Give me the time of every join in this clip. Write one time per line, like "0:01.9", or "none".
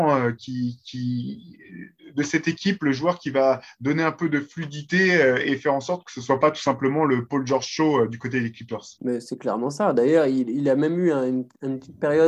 0:08.9